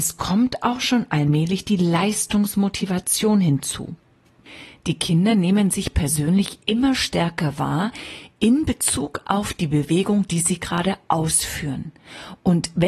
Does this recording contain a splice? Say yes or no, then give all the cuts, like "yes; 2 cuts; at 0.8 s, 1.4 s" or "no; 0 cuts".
no; 0 cuts